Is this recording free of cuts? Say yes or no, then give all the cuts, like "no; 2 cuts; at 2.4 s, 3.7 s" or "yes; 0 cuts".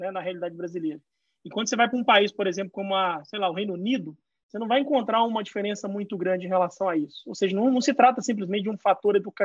yes; 0 cuts